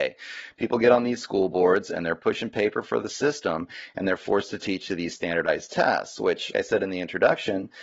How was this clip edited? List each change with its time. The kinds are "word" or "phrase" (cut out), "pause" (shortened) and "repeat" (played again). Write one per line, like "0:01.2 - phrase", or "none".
0:06.5 - word